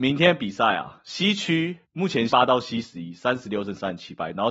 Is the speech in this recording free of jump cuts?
no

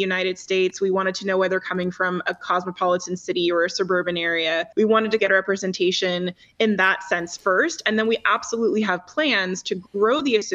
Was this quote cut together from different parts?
yes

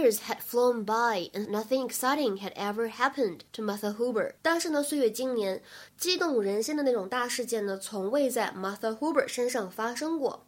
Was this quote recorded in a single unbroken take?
no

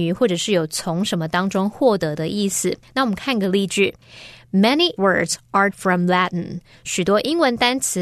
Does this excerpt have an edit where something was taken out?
yes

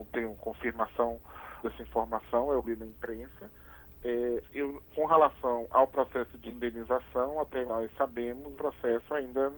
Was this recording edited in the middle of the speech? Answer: yes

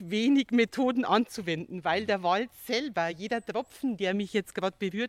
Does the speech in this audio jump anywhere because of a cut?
no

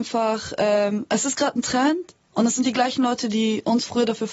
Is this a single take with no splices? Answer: yes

